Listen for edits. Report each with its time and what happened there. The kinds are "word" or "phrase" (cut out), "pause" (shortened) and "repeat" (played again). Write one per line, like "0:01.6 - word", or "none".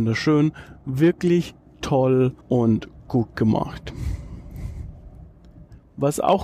0:02.4 - pause